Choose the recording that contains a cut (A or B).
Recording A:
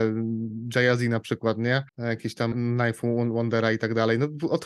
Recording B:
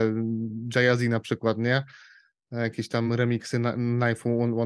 A